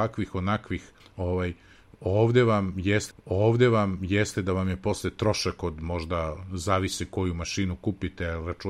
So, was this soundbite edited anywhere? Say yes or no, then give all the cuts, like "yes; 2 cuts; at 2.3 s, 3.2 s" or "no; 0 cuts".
yes; 2 cuts; at 1.0 s, 3.1 s